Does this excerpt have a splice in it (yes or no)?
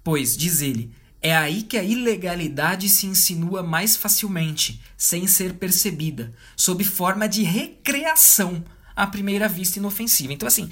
no